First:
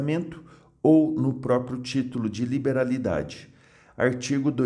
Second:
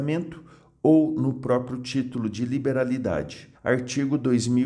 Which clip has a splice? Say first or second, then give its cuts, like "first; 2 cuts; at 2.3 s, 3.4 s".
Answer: second; 1 cut; at 3.5 s